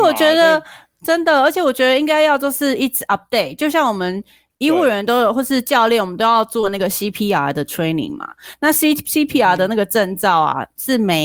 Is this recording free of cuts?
yes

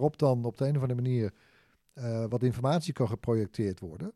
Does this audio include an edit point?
no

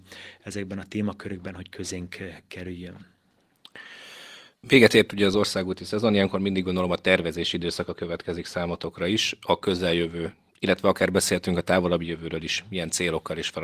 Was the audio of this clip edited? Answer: yes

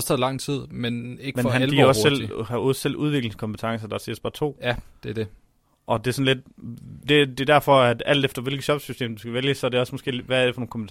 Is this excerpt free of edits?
yes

